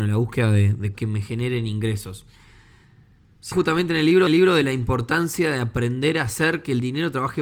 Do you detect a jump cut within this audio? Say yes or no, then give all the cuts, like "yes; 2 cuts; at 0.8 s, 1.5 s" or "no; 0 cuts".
yes; 3 cuts; at 0.9 s, 3.5 s, 4.3 s